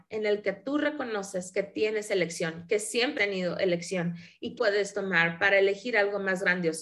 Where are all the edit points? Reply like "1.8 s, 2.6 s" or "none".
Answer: 3.2 s, 4.6 s